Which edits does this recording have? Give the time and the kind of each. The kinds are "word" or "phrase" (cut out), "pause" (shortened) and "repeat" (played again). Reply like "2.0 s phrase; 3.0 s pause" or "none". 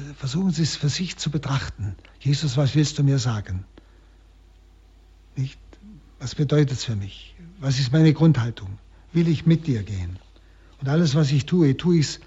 none

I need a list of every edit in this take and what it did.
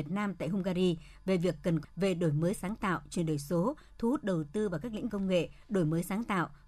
1.8 s word; 5.1 s word

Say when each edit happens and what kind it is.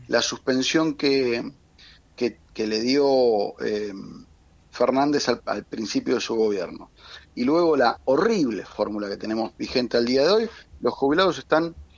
none

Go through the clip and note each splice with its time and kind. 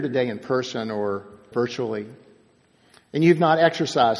1.5 s word

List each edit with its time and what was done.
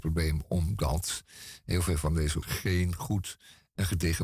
2.4 s word

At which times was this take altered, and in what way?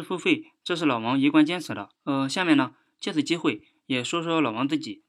2.0 s pause

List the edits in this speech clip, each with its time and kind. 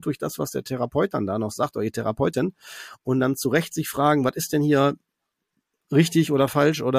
none

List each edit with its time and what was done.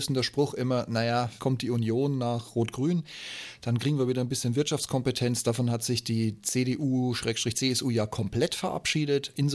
1.4 s word

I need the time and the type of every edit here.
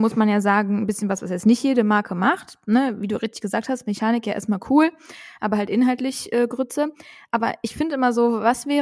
none

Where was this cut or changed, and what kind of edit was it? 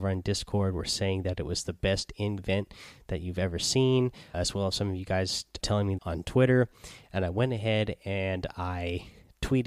2.4 s word; 4.3 s word; 5.6 s word; 6.0 s word

